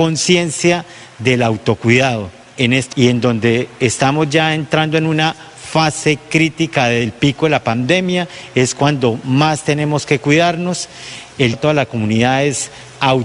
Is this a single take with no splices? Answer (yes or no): no